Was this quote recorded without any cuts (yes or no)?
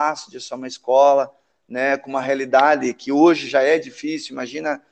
yes